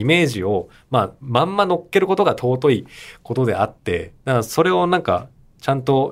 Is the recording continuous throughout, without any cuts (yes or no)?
no